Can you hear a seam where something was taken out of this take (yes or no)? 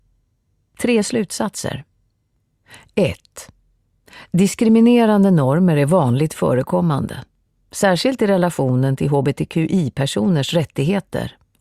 no